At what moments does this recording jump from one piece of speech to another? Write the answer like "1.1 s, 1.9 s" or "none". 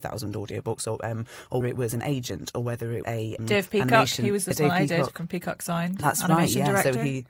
1.6 s, 3.0 s, 3.4 s, 4.5 s

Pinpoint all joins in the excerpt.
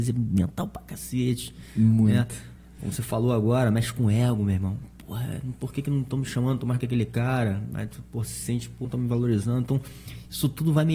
2.6 s, 6.8 s, 8.8 s

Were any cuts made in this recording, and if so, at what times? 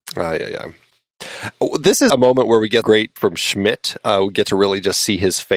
2.1 s, 2.8 s, 3.2 s

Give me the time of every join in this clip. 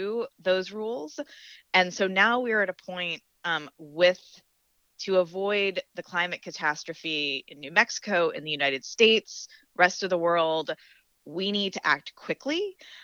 none

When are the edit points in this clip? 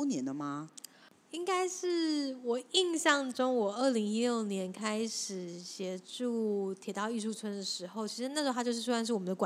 none

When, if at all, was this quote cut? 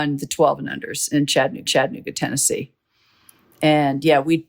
1.7 s

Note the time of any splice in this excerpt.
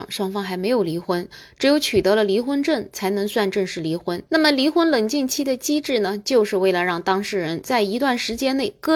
4.3 s

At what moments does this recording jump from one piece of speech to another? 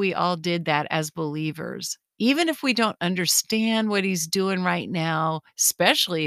none

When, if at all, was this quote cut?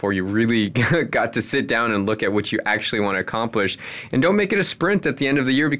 none

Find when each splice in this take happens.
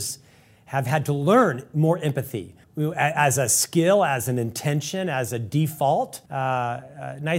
2.6 s, 6.3 s

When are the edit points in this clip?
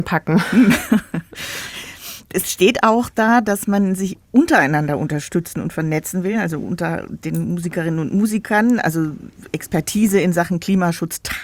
none

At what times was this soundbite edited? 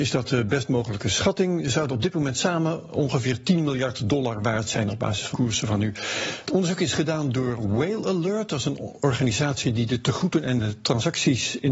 5.3 s

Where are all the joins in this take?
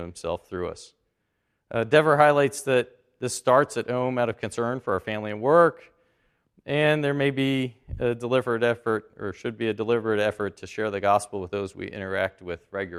none

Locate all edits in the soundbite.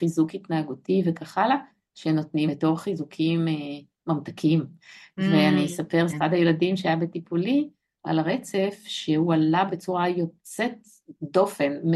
2.5 s, 6.1 s, 9.7 s

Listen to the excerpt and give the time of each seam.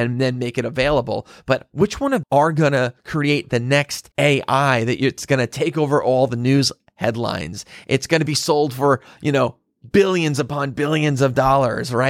2.2 s, 4.1 s

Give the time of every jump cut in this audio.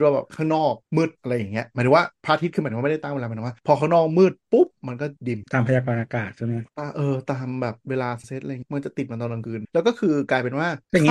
none

